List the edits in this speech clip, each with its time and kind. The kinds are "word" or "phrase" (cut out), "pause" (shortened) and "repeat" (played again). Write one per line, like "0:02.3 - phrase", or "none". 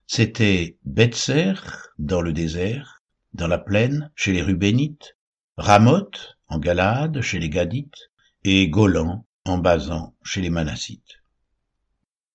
none